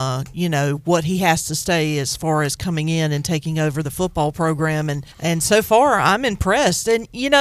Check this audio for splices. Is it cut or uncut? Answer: cut